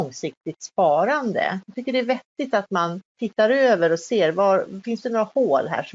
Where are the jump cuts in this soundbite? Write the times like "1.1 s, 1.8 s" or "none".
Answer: 3.1 s